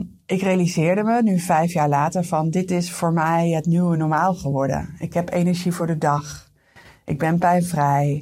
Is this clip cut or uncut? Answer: uncut